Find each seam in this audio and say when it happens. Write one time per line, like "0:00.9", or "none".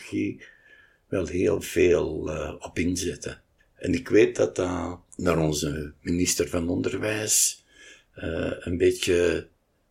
0:03.6
0:05.1